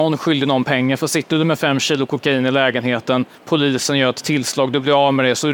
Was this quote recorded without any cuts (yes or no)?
no